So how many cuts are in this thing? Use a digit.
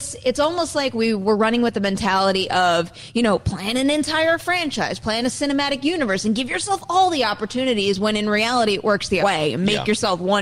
1